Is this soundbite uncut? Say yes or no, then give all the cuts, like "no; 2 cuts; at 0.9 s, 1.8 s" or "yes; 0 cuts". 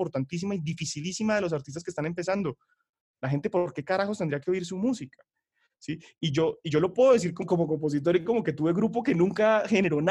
no; 1 cut; at 7.4 s